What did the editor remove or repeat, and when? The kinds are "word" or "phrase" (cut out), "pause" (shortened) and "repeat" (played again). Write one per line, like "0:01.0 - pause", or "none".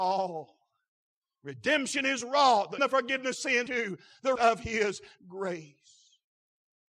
0:02.8 - word
0:03.4 - word
0:03.7 - word
0:04.4 - word